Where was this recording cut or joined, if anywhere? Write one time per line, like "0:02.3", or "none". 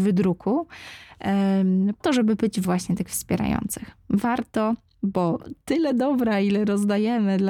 0:02.0
0:02.6